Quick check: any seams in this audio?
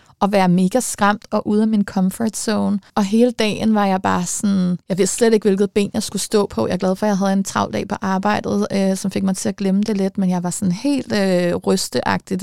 yes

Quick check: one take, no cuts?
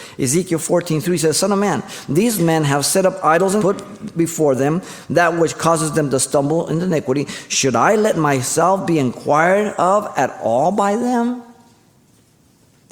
no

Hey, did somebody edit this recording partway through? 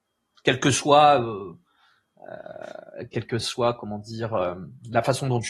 no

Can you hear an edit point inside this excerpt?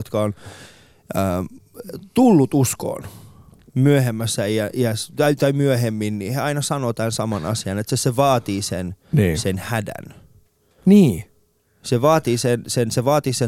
no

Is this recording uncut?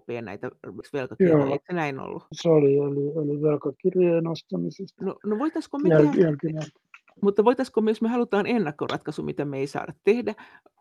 yes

